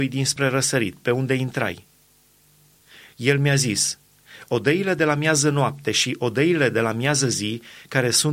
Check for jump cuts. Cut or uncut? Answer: uncut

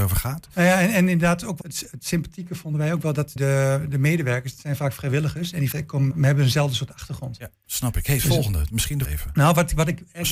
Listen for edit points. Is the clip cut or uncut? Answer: cut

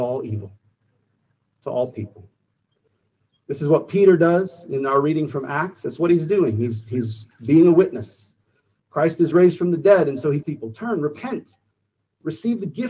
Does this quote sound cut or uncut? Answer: cut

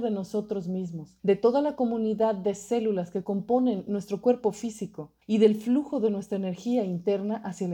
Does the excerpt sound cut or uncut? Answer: cut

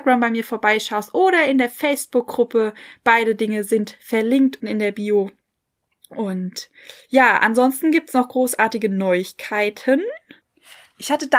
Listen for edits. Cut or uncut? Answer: cut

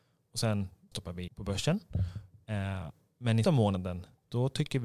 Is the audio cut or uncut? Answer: cut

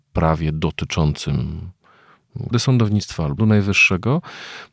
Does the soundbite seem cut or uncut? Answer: cut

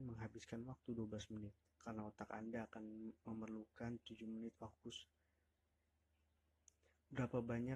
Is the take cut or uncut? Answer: cut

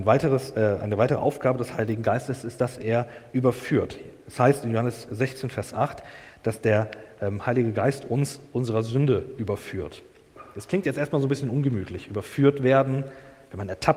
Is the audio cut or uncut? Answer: uncut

